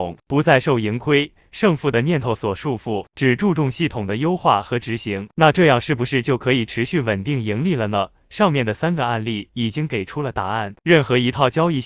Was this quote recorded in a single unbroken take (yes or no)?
yes